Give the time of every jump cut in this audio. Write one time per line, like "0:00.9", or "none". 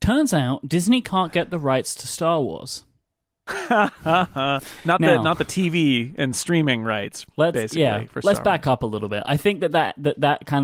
none